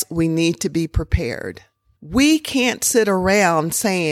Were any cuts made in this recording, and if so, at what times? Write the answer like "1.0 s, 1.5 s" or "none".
none